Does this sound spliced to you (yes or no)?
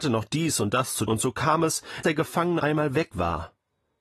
yes